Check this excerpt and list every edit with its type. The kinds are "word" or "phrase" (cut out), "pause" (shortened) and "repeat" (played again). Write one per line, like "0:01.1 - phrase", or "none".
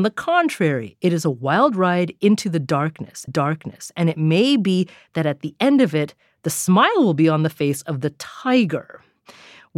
0:03.3 - repeat